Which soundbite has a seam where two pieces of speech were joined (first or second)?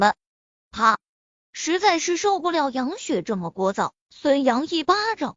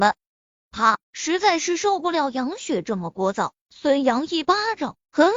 second